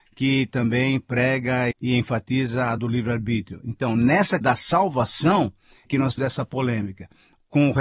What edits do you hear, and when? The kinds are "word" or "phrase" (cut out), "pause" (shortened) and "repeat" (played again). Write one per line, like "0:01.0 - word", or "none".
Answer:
0:01.7 - word
0:02.8 - word
0:04.4 - word
0:05.9 - word
0:06.2 - word